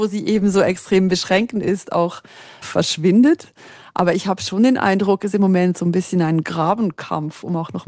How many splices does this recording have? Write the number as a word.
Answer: two